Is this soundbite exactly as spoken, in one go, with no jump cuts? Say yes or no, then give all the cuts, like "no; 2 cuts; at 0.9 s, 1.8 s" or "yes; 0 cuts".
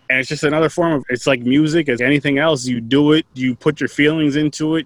no; 2 cuts; at 1.0 s, 2.0 s